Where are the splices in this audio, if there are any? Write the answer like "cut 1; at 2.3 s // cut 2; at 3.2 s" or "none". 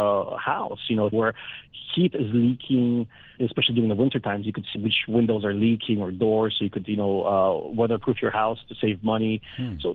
cut 1; at 1.1 s // cut 2; at 3.4 s // cut 3; at 4.8 s